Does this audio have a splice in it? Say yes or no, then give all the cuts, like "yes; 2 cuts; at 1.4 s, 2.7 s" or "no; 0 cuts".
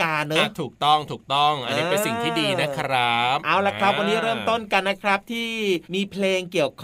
yes; 1 cut; at 5.8 s